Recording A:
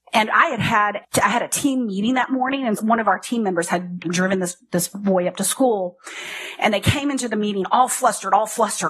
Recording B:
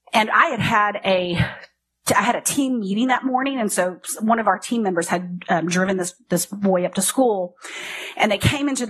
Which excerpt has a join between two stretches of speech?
A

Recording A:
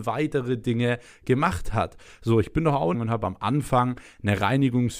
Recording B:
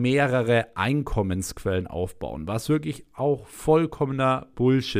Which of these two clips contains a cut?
A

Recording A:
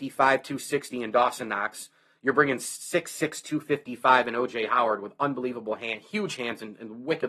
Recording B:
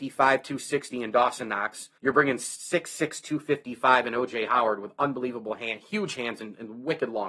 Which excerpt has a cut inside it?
B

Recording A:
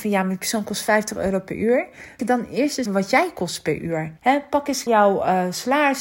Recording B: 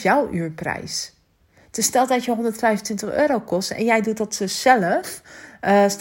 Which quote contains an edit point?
A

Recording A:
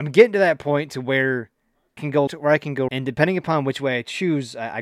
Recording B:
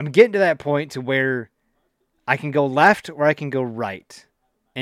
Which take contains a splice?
A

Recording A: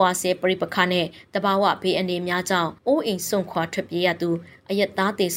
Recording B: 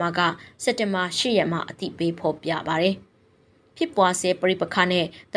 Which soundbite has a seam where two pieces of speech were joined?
A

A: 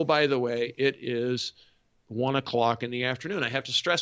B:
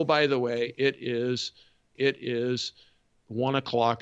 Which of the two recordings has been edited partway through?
B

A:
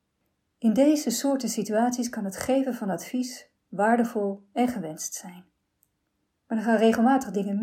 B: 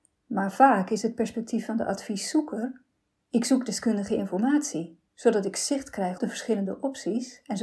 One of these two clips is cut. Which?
B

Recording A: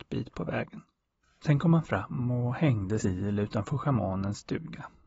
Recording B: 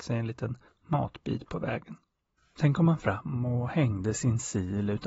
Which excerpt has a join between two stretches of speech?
A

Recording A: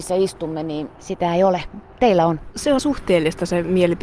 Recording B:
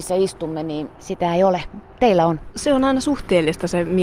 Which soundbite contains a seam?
A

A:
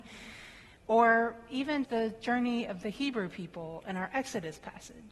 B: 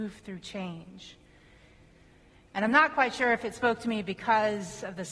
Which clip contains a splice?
A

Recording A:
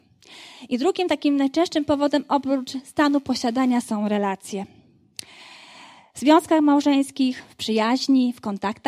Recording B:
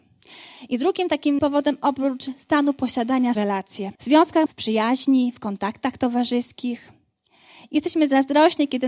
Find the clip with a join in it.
B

